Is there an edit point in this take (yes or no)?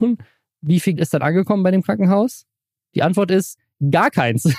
yes